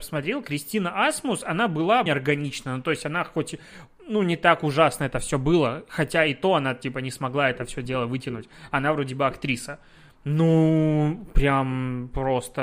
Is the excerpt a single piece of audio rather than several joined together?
no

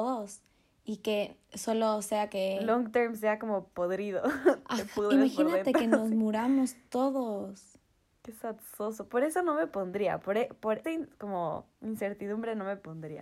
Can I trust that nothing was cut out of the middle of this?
no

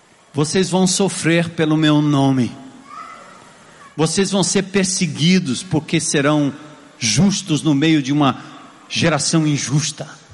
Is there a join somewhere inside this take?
no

